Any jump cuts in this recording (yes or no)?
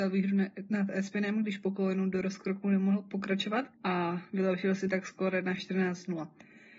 yes